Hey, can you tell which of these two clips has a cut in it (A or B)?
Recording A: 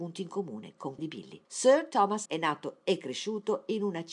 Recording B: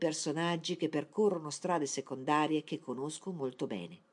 A